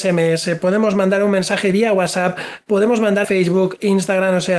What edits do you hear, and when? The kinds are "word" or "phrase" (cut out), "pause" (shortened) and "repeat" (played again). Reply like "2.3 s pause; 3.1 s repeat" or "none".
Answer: 3.2 s phrase